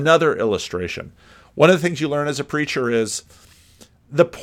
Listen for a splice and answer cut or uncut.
uncut